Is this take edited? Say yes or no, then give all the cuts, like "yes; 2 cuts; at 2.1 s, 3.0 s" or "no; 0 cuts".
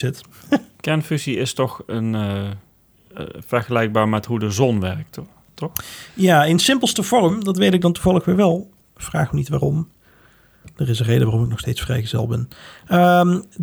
no; 0 cuts